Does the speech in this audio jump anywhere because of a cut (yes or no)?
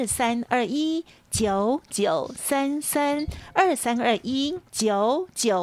yes